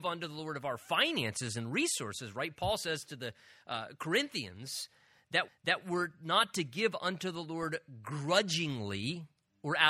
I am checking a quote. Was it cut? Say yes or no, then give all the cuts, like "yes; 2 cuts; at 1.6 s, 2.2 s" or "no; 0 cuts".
yes; 1 cut; at 5.5 s